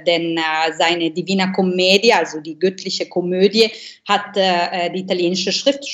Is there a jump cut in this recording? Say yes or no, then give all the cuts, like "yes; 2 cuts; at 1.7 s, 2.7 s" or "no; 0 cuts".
no; 0 cuts